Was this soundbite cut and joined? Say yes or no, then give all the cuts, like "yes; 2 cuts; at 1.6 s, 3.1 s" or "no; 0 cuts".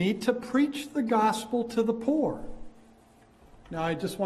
no; 0 cuts